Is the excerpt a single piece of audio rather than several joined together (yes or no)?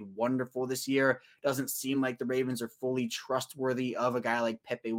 yes